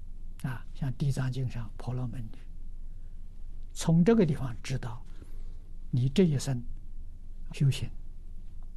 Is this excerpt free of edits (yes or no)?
no